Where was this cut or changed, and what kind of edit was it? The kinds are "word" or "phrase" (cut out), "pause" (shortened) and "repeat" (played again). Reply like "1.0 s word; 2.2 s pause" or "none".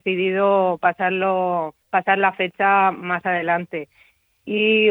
1.8 s pause